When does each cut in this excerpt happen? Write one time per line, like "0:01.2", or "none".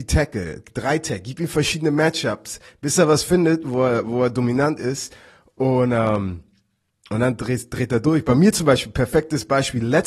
none